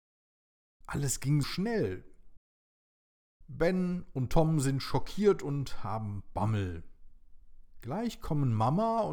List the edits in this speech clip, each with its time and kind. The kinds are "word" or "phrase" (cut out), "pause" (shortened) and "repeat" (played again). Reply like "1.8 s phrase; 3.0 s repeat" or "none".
1.4 s word